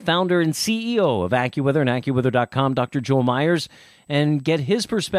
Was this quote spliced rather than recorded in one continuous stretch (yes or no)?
no